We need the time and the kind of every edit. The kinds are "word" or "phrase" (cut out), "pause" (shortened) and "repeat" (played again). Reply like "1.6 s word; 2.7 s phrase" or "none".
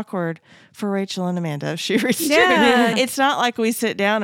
2.9 s word